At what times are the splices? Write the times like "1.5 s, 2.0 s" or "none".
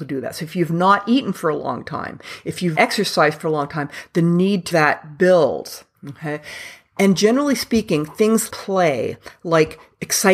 2.8 s, 4.7 s, 8.5 s